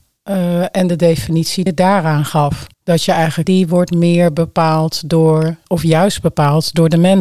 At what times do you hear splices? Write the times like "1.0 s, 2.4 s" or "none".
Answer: 1.7 s, 2.7 s, 3.4 s

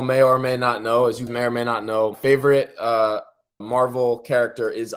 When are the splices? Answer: 1.3 s, 2.1 s, 3.6 s

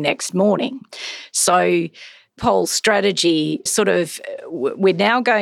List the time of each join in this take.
2.4 s, 3.7 s

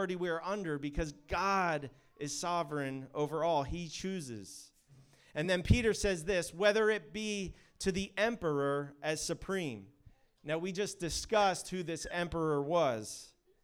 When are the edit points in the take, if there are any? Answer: none

